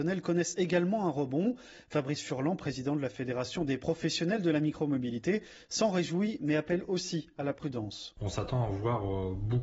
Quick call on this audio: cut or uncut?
uncut